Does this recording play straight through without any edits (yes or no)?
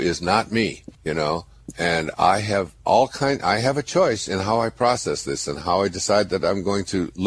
no